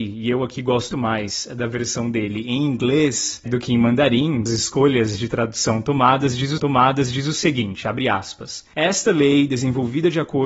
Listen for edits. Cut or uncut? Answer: cut